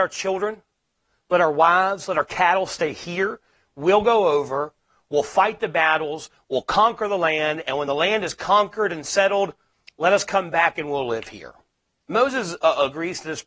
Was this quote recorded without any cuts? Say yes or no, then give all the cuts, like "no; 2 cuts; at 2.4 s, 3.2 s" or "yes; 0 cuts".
yes; 0 cuts